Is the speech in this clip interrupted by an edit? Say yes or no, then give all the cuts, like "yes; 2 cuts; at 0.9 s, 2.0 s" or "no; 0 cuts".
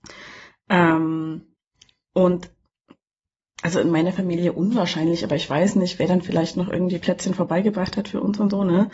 no; 0 cuts